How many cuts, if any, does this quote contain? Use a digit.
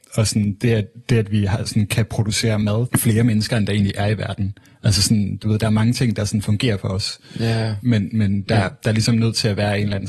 1